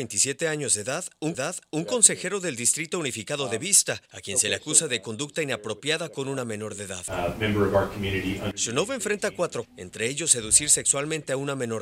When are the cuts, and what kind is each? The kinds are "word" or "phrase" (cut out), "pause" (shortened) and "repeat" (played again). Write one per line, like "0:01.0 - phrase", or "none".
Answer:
0:01.3 - repeat
0:04.1 - pause
0:09.6 - word